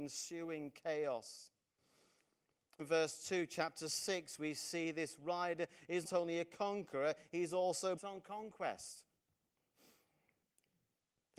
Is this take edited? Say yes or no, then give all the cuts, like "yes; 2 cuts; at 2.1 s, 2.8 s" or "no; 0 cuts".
yes; 3 cuts; at 2.8 s, 6.0 s, 8.0 s